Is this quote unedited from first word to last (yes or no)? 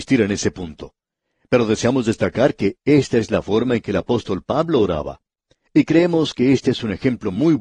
yes